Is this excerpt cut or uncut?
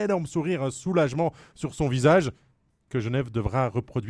uncut